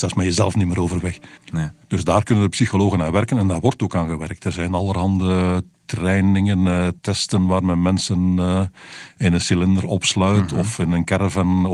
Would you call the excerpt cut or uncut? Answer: cut